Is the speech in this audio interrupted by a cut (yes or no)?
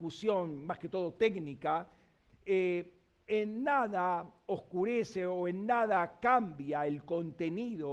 no